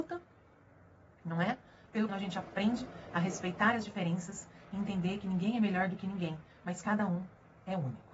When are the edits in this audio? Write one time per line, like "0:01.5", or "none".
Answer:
0:02.1